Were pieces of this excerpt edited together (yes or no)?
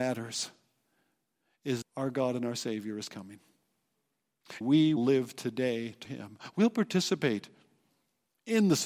yes